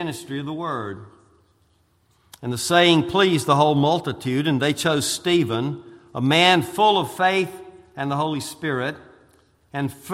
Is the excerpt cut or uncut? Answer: uncut